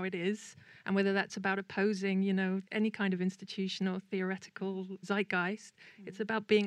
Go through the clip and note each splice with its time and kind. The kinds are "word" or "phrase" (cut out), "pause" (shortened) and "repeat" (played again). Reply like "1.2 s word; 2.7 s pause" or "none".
2.7 s pause; 5.0 s word